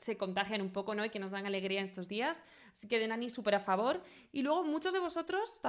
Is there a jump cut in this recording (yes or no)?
no